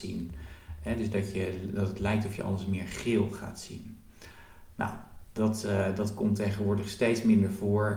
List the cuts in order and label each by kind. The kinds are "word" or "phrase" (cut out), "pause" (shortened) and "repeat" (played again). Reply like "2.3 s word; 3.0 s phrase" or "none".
none